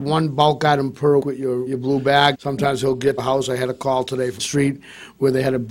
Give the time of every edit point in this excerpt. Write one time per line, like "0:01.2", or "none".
0:01.2
0:01.7
0:02.3
0:03.2
0:04.4